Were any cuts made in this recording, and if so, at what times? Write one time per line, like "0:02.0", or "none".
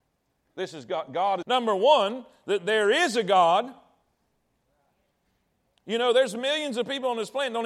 0:01.4